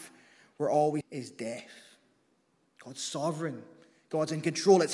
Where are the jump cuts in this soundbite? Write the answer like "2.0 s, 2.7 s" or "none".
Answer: 1.0 s